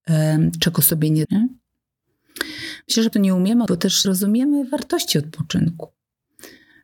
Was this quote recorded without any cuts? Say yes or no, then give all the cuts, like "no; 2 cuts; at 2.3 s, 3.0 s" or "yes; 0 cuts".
no; 4 cuts; at 1.2 s, 3.1 s, 3.7 s, 4.0 s